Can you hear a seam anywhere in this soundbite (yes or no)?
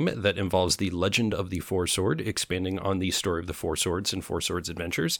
no